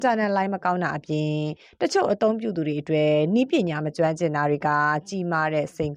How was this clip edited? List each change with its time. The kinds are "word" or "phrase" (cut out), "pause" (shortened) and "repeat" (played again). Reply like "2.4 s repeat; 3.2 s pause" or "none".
none